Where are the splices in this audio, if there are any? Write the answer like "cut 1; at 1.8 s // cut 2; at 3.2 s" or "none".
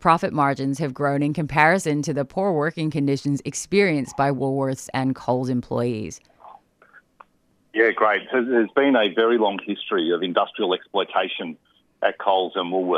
none